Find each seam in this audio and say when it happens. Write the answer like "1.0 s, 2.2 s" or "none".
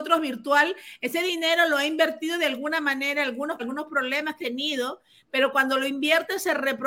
3.6 s, 4.4 s